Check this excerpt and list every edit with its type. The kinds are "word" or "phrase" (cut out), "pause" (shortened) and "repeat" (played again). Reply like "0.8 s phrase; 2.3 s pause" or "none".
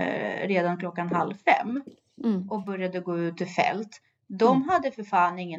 none